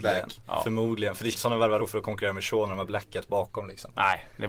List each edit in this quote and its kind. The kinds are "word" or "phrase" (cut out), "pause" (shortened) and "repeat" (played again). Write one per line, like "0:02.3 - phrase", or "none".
0:01.3 - phrase
0:01.8 - word